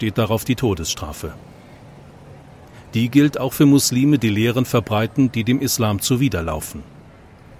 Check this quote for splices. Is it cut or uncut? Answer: uncut